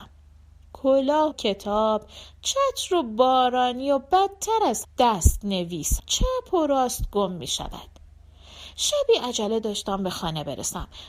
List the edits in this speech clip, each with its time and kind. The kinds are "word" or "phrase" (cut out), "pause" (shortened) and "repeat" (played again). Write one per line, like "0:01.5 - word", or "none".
0:01.3 - word
0:04.8 - word
0:06.0 - word